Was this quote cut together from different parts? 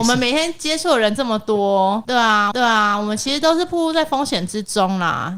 yes; 1 cut; at 2.5 s

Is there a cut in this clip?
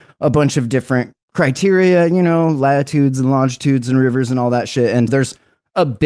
yes; 1 cut; at 5.1 s

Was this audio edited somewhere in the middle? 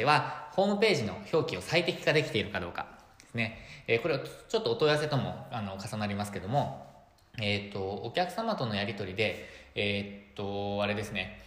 no; 0 cuts

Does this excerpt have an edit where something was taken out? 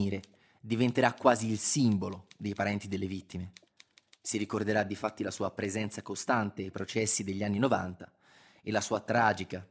no; 0 cuts

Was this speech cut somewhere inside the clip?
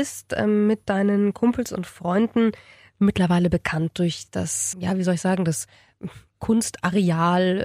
yes; 1 cut; at 4.7 s

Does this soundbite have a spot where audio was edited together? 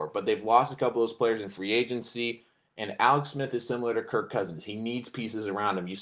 no; 0 cuts

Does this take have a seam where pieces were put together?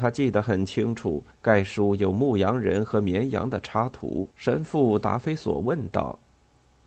yes; 1 cut; at 4.3 s

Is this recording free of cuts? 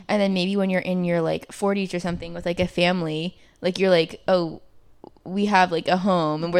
yes; 0 cuts

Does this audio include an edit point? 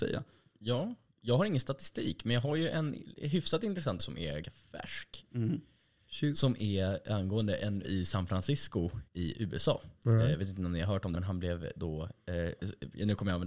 yes; 6 cuts; at 4.0 s, 4.4 s, 7.8 s, 9.1 s, 10.0 s, 11.1 s

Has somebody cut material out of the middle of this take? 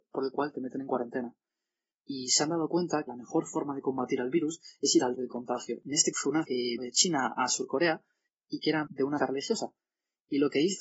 yes; 7 cuts; at 3.1 s, 5.1 s, 6.1 s, 6.4 s, 6.8 s, 8.9 s, 9.2 s

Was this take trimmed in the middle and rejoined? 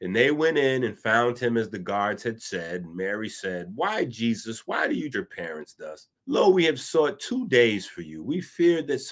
yes; 2 cuts; at 5.1 s, 6.2 s

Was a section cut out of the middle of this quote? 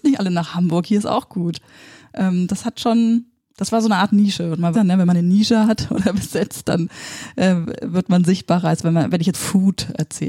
yes; 2 cuts; at 4.7 s, 9.3 s

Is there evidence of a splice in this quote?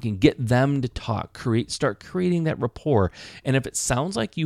no; 0 cuts

